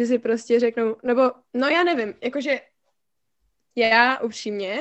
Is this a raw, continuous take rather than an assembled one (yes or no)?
yes